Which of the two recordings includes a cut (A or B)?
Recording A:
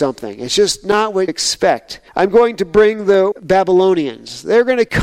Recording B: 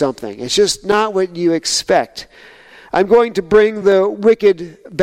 A